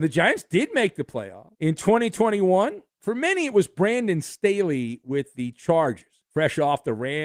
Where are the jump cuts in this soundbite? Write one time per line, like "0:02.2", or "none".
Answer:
0:01.5
0:02.9
0:06.3